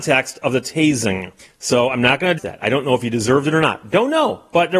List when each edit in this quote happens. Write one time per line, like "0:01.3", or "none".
0:01.4
0:02.4